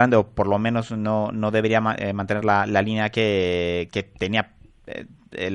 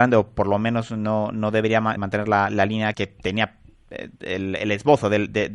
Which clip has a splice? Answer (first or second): second